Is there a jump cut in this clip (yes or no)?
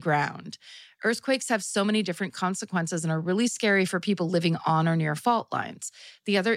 no